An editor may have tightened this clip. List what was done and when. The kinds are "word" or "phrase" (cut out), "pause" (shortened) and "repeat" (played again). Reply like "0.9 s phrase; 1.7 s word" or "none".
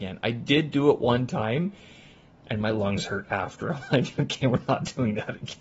none